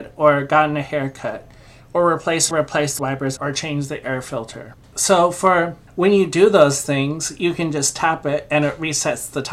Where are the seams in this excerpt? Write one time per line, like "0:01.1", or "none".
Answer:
0:02.5
0:03.0
0:03.4
0:05.9